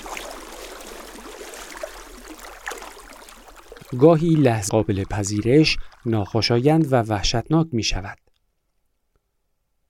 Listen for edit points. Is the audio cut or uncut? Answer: cut